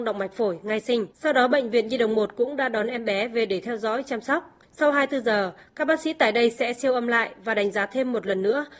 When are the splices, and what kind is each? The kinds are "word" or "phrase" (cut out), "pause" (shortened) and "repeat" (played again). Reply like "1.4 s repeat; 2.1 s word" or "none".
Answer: 1.1 s pause; 4.6 s pause